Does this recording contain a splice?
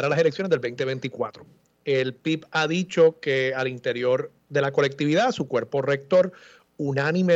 no; 0 cuts

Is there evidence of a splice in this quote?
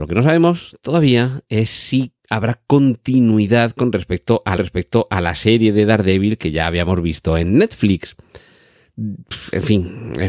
yes; 2 cuts; at 2.2 s, 4.6 s

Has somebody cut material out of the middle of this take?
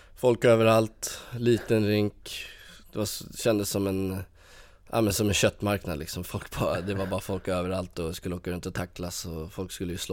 no; 0 cuts

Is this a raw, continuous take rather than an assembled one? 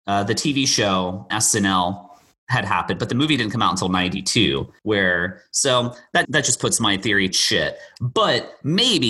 no; 4 cuts; at 1.3 s, 4.8 s, 6.2 s, 7.3 s

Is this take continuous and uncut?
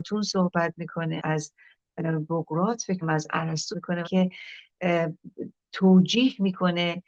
no; 4 cuts; at 1.2 s, 3.0 s, 3.7 s, 4.0 s

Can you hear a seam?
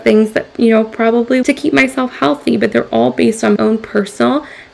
yes; 2 cuts; at 1.4 s, 3.6 s

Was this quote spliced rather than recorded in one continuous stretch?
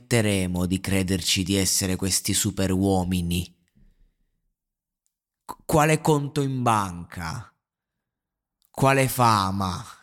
no; 0 cuts

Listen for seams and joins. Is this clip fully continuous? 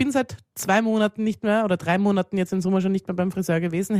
yes; 0 cuts

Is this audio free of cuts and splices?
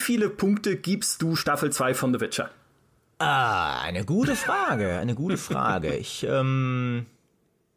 yes; 0 cuts

